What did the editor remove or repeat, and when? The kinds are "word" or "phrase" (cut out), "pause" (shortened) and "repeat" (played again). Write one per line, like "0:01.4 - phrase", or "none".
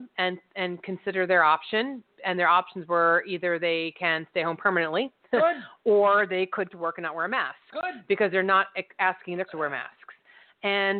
0:06.7 - word
0:09.5 - word